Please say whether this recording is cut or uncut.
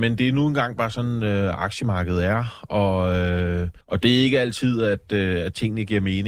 cut